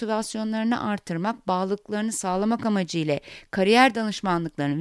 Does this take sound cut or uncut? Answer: uncut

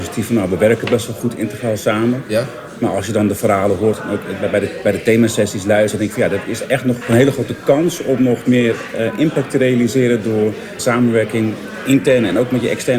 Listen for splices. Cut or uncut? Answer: cut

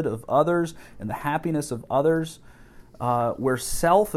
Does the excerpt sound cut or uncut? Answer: uncut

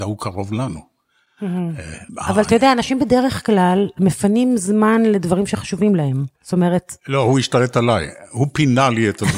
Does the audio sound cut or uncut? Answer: cut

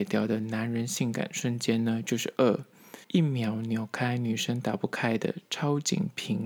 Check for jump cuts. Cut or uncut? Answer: cut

